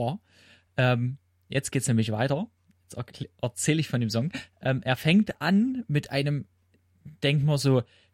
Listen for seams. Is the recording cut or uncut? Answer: uncut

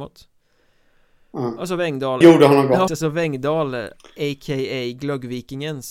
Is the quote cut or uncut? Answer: cut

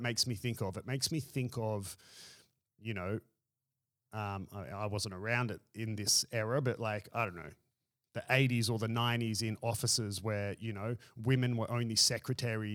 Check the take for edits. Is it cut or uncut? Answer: uncut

